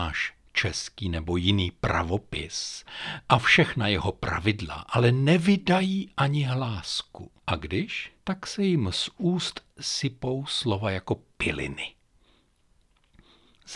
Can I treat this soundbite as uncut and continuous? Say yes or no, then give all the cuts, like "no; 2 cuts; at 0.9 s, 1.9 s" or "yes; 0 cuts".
no; 2 cuts; at 7.4 s, 8.2 s